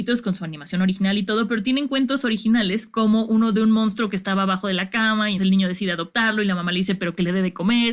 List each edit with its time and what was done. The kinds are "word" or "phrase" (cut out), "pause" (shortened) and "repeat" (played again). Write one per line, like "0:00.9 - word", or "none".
0:05.4 - word